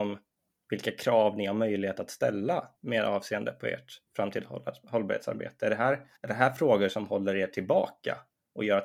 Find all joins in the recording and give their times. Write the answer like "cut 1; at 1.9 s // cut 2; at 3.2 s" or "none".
cut 1; at 2.8 s // cut 2; at 4.1 s // cut 3; at 6.2 s